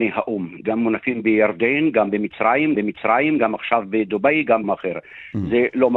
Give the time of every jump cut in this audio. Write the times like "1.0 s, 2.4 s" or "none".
2.7 s, 4.6 s